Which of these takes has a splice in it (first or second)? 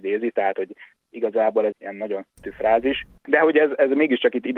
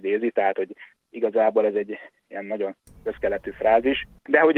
first